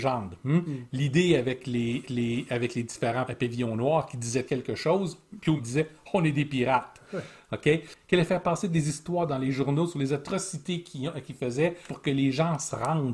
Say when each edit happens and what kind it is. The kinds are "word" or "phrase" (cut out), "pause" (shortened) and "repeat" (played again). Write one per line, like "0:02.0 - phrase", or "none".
0:02.0 - repeat
0:03.3 - word
0:04.5 - word
0:05.6 - word
0:11.9 - word

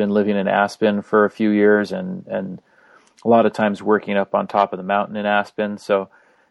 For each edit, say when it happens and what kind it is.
none

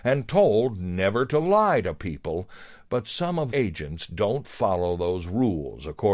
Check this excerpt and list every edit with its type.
0:03.5 - word

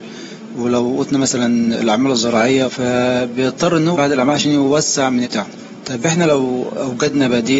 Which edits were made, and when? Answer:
0:02.7 - word
0:03.9 - word
0:05.2 - word

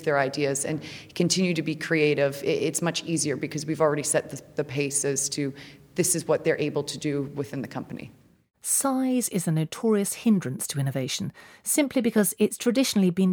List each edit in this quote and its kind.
none

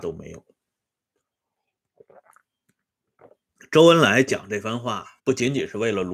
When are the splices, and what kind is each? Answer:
0:05.2 - pause

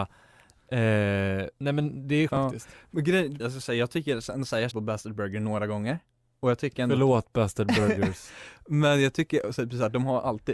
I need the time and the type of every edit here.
0:02.3 - word
0:03.4 - word
0:04.7 - word

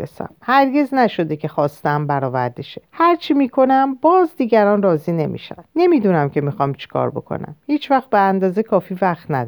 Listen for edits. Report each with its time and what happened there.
0:02.9 - pause
0:05.7 - pause

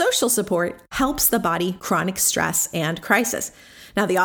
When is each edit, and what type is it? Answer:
0:01.8 - word

